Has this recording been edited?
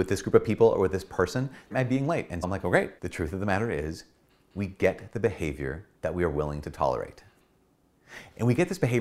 yes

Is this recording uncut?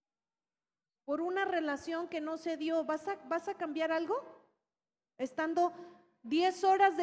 yes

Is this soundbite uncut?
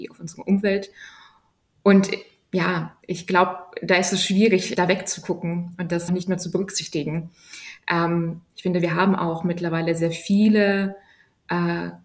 no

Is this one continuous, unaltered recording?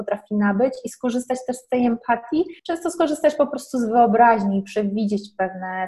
no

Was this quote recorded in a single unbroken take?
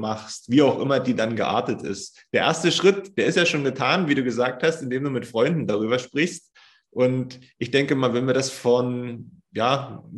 yes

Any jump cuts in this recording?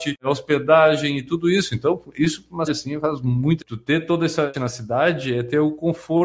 yes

